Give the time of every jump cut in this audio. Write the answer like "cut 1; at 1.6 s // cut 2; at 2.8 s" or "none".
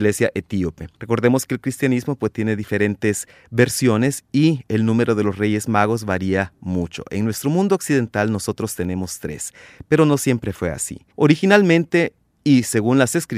cut 1; at 0.9 s // cut 2; at 11.1 s